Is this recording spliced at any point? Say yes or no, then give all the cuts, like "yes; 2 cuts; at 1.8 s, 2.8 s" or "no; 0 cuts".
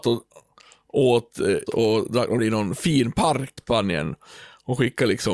yes; 3 cuts; at 1.7 s, 2.4 s, 3.6 s